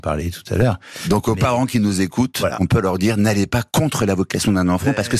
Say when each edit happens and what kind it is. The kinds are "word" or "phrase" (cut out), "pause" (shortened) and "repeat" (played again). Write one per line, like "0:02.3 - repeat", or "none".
none